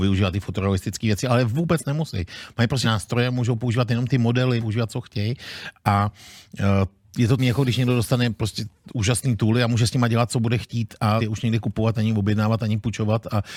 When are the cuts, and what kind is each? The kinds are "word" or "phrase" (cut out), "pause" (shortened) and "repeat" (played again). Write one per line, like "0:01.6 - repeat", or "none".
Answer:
0:02.8 - word
0:04.6 - word
0:07.0 - pause
0:07.4 - phrase
0:11.2 - phrase